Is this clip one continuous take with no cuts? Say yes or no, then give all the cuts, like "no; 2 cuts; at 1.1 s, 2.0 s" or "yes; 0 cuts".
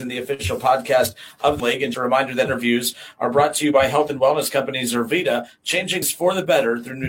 no; 4 cuts; at 1.6 s, 1.9 s, 2.4 s, 6.0 s